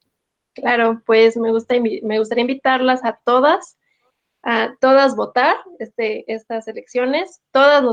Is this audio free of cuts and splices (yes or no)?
yes